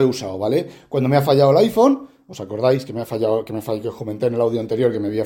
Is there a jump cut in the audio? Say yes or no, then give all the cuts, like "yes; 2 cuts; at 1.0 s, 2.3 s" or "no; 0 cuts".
no; 0 cuts